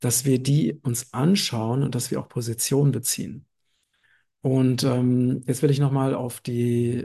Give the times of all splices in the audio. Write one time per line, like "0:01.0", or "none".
none